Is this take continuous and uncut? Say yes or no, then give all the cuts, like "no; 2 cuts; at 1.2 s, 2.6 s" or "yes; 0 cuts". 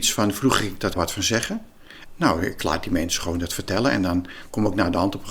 no; 1 cut; at 0.9 s